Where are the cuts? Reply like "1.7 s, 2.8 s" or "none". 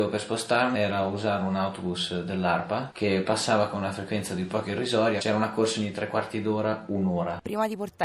none